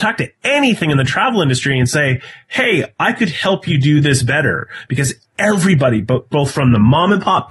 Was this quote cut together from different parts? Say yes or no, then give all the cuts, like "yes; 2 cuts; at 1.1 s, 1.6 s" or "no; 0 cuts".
no; 0 cuts